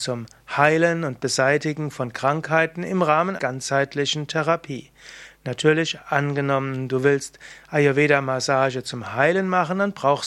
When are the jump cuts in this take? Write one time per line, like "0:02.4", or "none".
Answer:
0:03.4